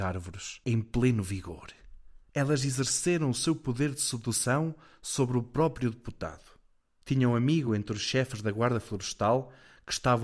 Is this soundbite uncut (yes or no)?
yes